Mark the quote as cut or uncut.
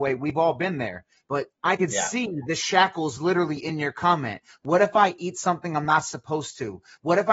cut